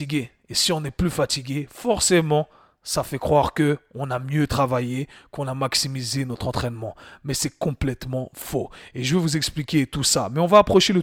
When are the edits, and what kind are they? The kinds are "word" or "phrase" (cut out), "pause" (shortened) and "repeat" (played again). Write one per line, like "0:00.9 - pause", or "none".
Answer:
none